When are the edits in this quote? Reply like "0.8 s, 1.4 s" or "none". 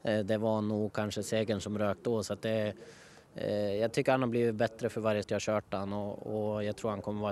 5.2 s